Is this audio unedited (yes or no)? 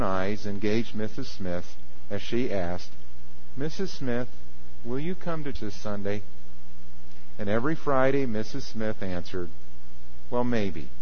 no